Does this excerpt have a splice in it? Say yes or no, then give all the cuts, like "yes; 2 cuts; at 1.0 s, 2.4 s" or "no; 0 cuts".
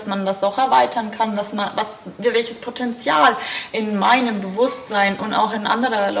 no; 0 cuts